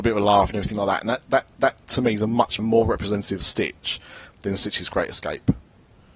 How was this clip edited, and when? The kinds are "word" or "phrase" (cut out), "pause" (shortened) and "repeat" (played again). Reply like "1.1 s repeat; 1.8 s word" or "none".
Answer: 1.6 s repeat; 2.6 s phrase